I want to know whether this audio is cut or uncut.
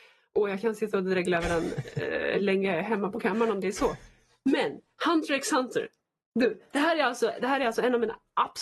uncut